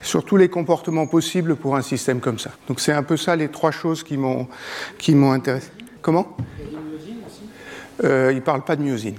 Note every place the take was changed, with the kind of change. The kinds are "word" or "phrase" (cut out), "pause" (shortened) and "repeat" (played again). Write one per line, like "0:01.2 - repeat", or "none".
0:02.6 - pause
0:06.0 - pause